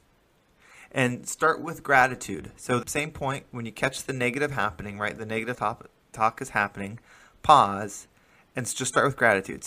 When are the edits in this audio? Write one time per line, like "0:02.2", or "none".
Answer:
0:02.8
0:05.5